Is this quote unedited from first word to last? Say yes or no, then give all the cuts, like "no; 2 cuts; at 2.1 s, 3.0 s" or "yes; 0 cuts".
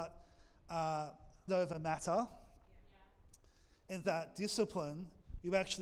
no; 2 cuts; at 1.5 s, 4.0 s